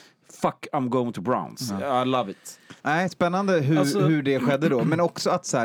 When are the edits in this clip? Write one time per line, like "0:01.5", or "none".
0:02.8